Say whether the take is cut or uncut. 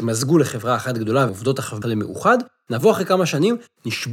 cut